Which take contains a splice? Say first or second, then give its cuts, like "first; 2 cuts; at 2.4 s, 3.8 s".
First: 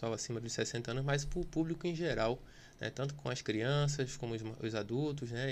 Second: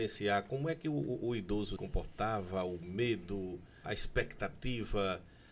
second; 2 cuts; at 1.8 s, 3.8 s